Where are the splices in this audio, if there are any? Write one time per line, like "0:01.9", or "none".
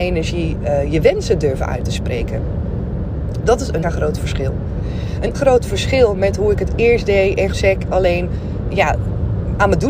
0:03.8
0:05.3
0:07.5
0:08.7